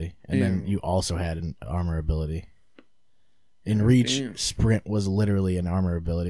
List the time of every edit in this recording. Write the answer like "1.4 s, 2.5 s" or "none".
none